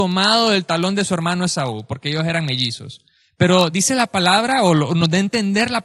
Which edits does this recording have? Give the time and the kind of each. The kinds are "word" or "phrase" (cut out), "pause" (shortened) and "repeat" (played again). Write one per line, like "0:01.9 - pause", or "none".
none